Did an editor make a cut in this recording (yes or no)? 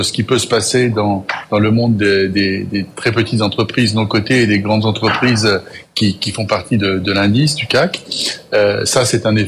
no